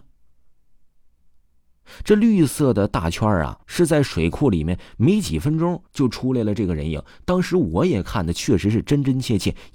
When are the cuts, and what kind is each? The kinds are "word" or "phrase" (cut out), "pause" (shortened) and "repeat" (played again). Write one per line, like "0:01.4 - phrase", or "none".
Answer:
0:03.6 - pause
0:05.9 - pause